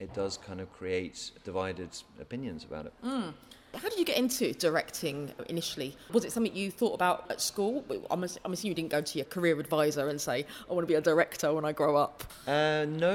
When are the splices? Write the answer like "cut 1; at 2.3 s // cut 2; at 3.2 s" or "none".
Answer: cut 1; at 1.4 s // cut 2; at 3.0 s